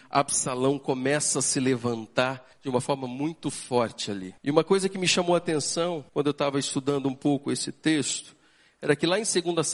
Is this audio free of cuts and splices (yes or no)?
no